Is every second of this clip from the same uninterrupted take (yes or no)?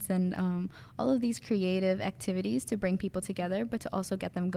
yes